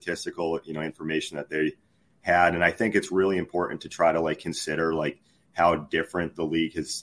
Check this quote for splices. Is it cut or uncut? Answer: uncut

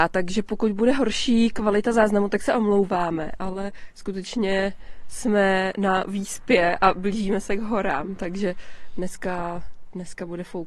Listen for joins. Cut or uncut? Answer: uncut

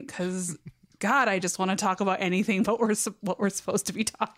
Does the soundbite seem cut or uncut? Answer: uncut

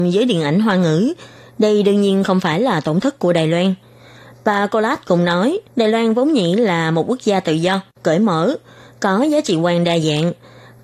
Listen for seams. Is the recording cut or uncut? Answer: cut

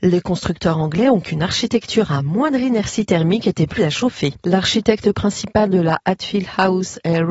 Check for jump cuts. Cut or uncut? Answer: cut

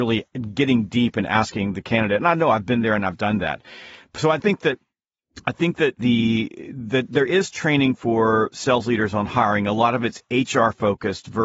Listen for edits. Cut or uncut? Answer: cut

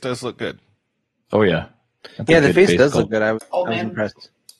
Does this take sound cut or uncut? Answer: cut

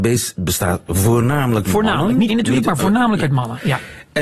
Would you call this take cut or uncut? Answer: cut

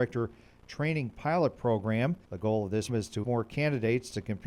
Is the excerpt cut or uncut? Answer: cut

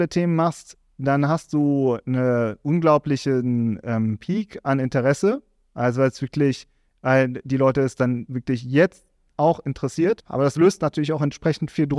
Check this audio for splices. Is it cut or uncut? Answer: uncut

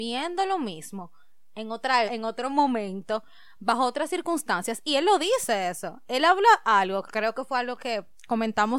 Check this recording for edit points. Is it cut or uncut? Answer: cut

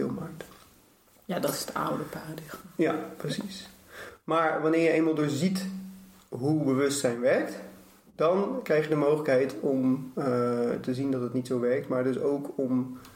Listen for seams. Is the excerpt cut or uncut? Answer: uncut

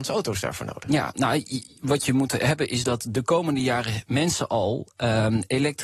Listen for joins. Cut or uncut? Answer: uncut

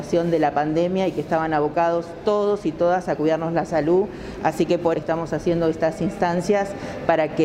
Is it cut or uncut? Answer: cut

